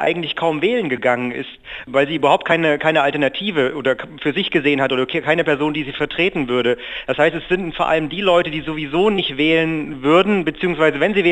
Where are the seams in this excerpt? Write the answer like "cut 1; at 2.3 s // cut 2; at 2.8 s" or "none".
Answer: none